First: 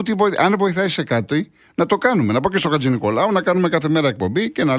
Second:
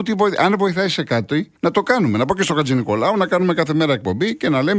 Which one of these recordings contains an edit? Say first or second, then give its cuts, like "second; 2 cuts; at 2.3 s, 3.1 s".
second; 1 cut; at 1.6 s